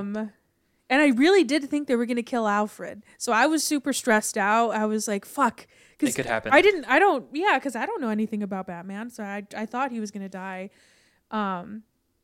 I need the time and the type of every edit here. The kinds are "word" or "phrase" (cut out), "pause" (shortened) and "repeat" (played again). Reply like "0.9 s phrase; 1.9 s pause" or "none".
none